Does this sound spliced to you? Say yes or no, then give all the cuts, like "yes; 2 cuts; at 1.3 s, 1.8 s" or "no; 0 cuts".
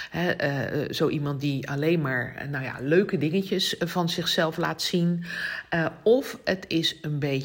no; 0 cuts